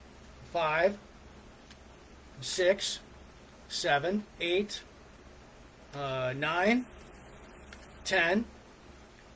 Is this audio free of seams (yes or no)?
no